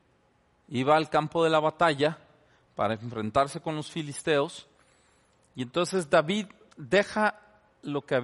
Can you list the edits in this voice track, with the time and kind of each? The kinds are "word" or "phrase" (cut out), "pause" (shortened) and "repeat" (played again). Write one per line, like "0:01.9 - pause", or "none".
none